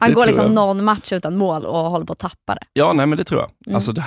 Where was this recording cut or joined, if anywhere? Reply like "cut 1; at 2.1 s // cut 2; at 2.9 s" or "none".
none